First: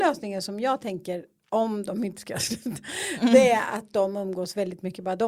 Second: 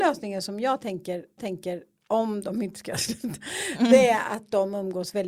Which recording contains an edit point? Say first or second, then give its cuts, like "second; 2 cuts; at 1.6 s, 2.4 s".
second; 1 cut; at 1.4 s